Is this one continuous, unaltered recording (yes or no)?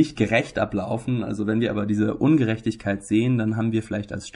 yes